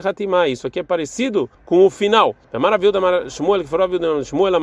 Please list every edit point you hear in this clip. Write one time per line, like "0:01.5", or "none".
0:01.5
0:02.4